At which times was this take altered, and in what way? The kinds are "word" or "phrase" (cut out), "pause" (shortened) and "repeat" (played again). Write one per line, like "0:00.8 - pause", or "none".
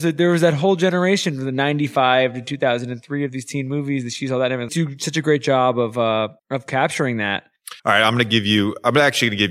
0:04.7 - phrase
0:06.4 - pause
0:07.8 - pause